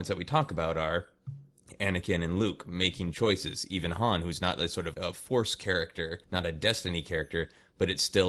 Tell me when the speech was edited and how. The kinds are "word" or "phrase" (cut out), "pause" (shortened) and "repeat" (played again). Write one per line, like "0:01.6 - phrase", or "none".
0:04.9 - word
0:06.2 - pause

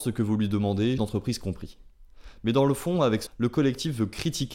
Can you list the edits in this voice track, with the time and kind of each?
0:01.0 - word
0:03.3 - word

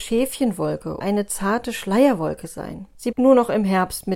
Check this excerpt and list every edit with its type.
0:01.0 - word
0:03.1 - word

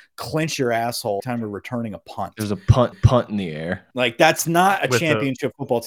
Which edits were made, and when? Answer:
0:01.2 - word
0:02.9 - repeat
0:03.9 - pause

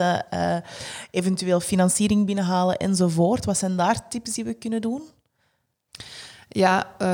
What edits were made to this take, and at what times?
none

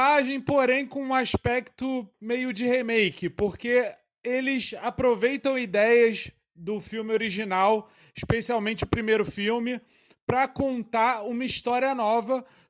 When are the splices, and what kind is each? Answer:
none

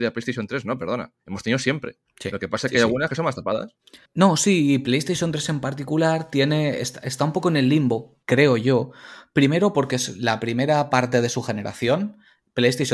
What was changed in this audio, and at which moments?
0:01.2 - pause
0:02.1 - pause
0:04.1 - pause
0:08.2 - pause

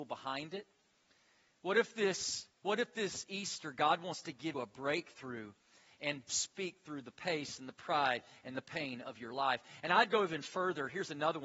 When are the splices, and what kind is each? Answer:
0:02.6 - pause
0:04.5 - word
0:06.3 - phrase

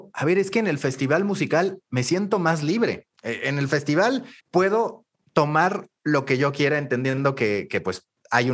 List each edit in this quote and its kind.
0:03.1 - pause
0:04.4 - pause

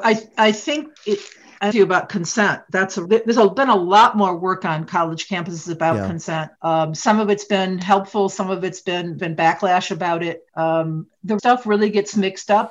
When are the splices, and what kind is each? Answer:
0:01.0 - pause
0:01.7 - phrase
0:03.0 - word
0:06.6 - pause
0:09.2 - word
0:10.5 - pause
0:11.4 - word

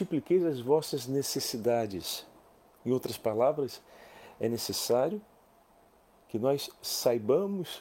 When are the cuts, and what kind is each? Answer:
none

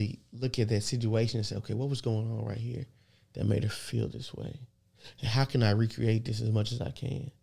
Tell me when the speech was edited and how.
none

